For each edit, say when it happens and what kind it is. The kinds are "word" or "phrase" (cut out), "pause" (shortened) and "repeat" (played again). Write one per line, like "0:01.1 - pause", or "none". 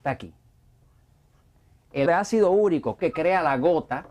0:02.0 - word
0:03.0 - phrase